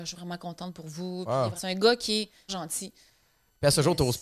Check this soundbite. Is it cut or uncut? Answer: cut